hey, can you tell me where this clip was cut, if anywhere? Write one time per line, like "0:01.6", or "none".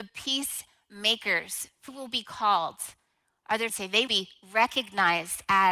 0:01.9
0:03.7
0:04.1